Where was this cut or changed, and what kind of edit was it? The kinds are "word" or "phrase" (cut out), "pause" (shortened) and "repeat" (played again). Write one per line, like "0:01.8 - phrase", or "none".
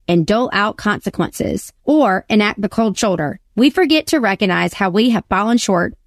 0:01.8 - pause
0:03.5 - pause